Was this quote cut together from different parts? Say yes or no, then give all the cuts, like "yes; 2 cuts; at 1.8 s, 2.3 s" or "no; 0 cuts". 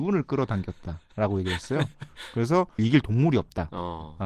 yes; 1 cut; at 2.8 s